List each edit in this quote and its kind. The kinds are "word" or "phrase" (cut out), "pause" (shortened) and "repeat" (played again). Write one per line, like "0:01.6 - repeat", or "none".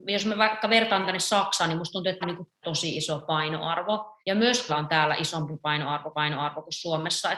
0:02.2 - word
0:02.6 - word
0:04.2 - pause
0:04.7 - word
0:06.1 - repeat